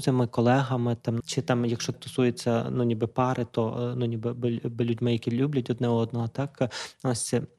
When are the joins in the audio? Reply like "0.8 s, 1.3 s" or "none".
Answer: 1.2 s, 1.9 s